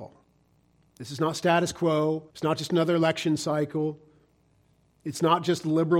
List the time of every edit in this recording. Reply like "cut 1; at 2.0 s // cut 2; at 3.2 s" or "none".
cut 1; at 2.3 s